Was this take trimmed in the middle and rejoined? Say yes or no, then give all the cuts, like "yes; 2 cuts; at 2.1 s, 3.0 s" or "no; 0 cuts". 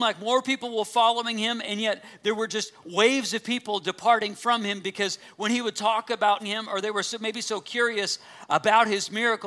yes; 1 cut; at 6.4 s